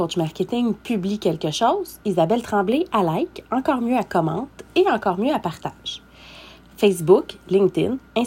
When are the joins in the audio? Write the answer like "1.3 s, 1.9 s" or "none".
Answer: none